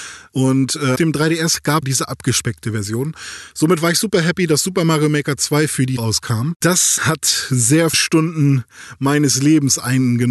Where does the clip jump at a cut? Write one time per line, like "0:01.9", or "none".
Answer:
0:01.0
0:01.8
0:06.0
0:07.0
0:07.9